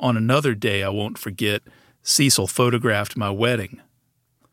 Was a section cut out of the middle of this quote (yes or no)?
no